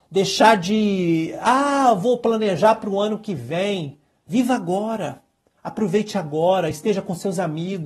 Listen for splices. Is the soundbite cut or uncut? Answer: uncut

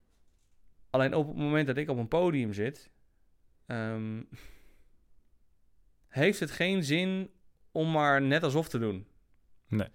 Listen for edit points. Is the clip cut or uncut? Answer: uncut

